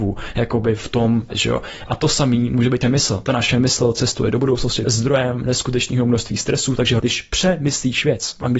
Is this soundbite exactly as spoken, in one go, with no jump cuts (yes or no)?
no